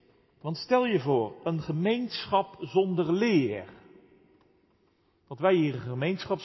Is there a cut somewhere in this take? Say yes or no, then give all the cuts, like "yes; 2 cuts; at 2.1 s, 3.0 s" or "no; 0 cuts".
no; 0 cuts